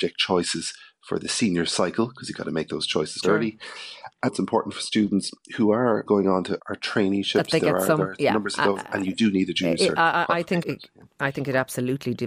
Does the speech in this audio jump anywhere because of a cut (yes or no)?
yes